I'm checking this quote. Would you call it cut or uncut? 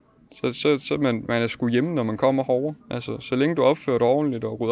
cut